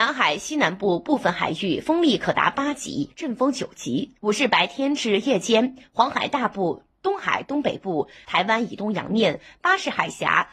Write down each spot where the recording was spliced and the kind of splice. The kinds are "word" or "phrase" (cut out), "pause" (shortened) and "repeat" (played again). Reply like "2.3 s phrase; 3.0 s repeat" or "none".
4.2 s pause; 8.2 s phrase